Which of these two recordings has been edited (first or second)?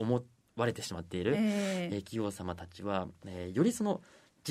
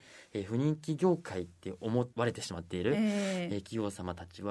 second